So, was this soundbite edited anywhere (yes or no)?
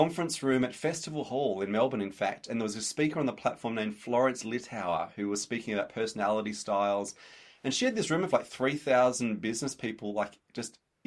no